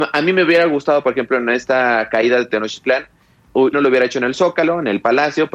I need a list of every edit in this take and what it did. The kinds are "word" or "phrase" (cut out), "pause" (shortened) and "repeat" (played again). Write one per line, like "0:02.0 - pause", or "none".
0:03.7 - word